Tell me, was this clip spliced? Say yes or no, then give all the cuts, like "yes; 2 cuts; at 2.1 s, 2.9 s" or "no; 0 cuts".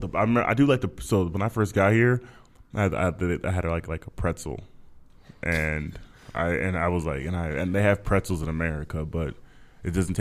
no; 0 cuts